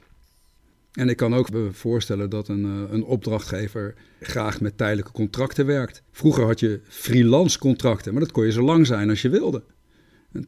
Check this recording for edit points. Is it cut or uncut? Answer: cut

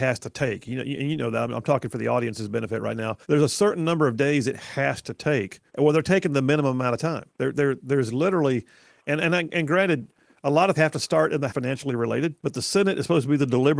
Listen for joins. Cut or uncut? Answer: cut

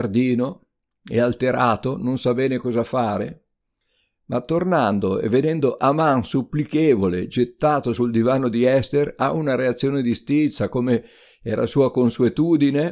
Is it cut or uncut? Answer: uncut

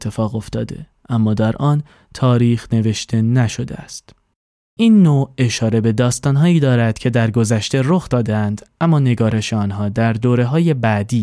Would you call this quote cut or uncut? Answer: uncut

